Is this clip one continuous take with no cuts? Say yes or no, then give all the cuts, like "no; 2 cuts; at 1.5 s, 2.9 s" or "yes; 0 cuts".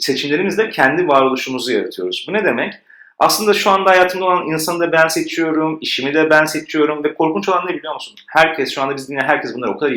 yes; 0 cuts